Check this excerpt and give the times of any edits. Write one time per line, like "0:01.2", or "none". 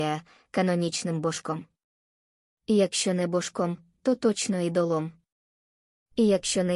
none